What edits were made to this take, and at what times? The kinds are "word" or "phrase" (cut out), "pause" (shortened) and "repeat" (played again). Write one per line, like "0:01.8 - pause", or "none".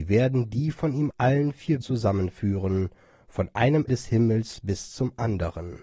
0:01.1 - phrase
0:01.8 - word
0:03.9 - word